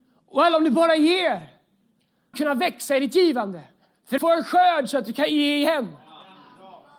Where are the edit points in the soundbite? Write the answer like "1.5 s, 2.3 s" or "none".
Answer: 2.3 s, 3.8 s, 4.2 s